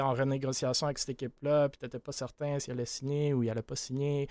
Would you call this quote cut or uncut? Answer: uncut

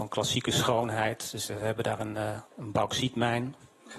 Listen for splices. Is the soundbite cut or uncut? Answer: cut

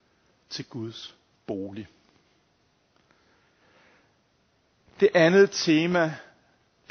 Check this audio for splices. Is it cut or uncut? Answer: uncut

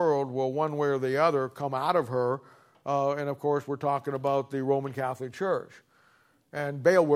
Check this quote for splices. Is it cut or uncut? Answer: uncut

